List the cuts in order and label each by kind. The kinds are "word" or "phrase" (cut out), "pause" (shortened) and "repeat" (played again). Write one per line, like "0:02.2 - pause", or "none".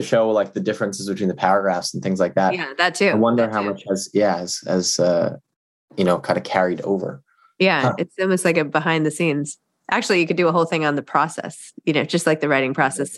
none